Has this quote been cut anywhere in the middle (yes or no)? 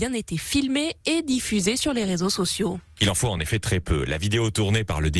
no